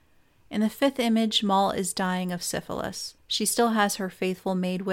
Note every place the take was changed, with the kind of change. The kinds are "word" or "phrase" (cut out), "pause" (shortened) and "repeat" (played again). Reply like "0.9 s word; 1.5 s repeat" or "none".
3.2 s pause